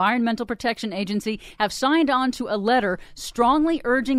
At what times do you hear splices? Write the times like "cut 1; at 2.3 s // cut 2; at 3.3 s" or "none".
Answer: none